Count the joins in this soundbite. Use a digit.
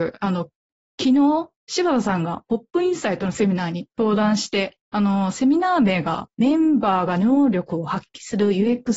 1